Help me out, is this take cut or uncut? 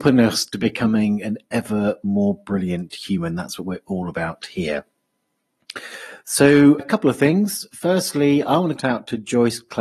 cut